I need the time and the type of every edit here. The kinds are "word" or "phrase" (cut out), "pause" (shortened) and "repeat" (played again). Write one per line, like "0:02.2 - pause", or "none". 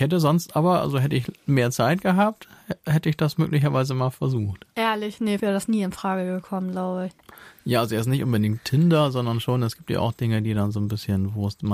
0:05.4 - phrase